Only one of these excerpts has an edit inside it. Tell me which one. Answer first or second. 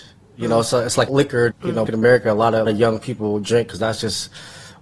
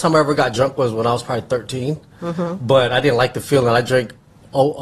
first